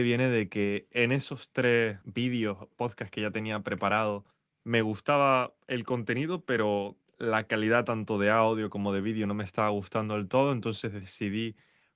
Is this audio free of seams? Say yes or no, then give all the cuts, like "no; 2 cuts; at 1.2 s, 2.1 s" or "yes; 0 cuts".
no; 2 cuts; at 2.0 s, 4.3 s